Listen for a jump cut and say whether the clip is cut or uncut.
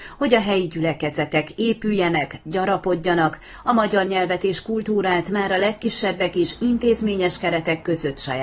uncut